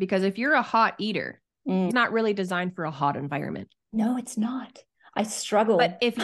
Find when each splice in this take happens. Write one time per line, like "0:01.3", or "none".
0:01.9
0:03.8